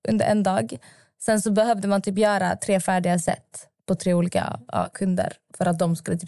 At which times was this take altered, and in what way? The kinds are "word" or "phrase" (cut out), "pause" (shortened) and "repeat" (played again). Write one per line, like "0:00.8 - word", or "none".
none